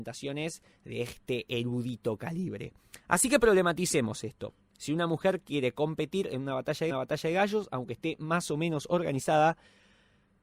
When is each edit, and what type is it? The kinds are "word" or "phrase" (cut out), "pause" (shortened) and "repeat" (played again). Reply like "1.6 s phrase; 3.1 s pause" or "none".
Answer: 3.0 s pause; 6.9 s repeat